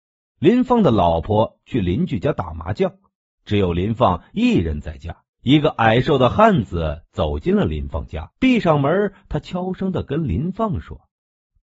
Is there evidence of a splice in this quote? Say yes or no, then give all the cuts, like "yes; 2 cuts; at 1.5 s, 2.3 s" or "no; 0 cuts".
yes; 2 cuts; at 5.3 s, 8.4 s